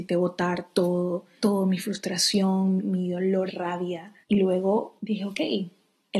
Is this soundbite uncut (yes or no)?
no